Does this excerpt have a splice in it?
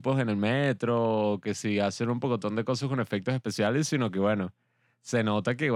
no; 0 cuts

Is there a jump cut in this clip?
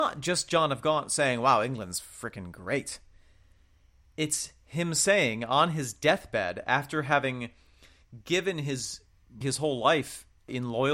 yes; 1 cut; at 9.4 s

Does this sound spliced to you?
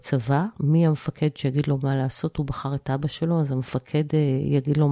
no; 0 cuts

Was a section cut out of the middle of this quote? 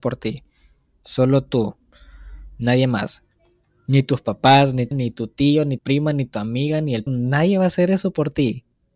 yes; 3 cuts; at 4.9 s, 5.8 s, 7.1 s

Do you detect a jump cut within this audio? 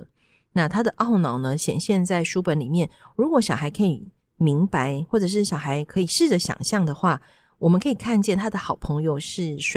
no; 0 cuts

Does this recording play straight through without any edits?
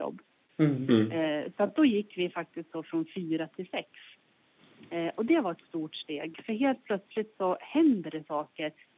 yes; 0 cuts

